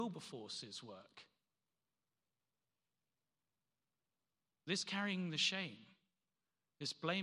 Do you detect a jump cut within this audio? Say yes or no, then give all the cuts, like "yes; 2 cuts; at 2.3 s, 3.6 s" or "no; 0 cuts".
no; 0 cuts